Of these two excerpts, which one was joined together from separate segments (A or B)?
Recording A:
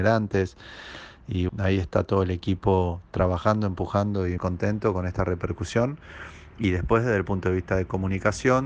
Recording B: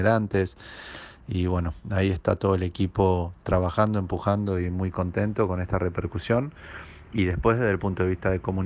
A